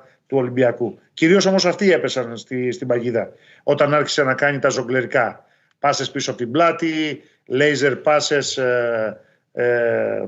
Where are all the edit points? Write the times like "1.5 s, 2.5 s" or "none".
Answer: none

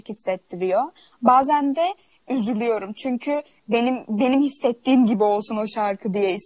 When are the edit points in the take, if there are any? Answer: none

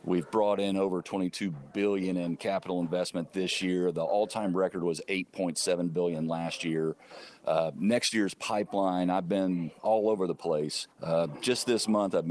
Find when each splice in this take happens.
10.9 s

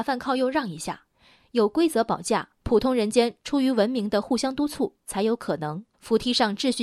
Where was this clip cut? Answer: 1.1 s, 2.6 s, 5.9 s

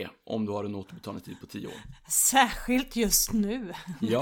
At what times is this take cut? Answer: none

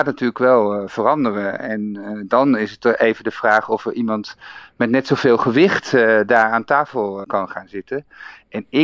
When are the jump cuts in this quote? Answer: 7.2 s

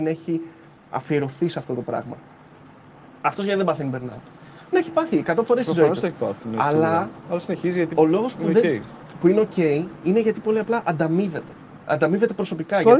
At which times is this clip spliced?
4.7 s

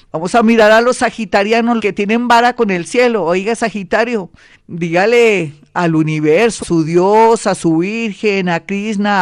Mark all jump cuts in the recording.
1.8 s, 4.5 s, 6.6 s

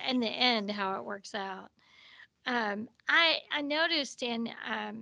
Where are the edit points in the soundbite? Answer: none

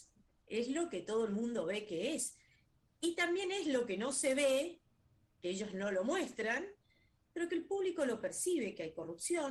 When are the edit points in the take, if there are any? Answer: none

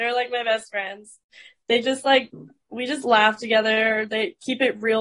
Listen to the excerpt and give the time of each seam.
none

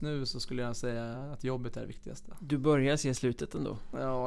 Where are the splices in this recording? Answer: none

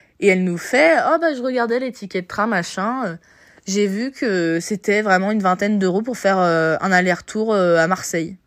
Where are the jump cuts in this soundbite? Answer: none

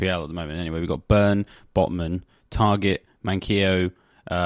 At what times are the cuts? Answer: none

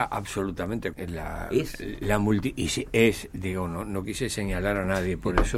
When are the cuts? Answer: 0.9 s

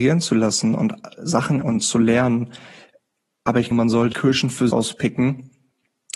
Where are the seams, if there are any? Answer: 1.6 s, 3.7 s, 4.1 s, 4.7 s

